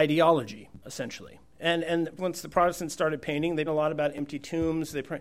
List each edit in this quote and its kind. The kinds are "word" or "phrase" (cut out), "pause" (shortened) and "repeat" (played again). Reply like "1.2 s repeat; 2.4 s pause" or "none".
2.2 s word; 3.7 s word